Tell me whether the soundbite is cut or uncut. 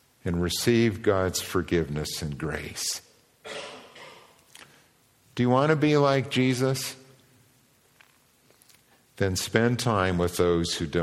uncut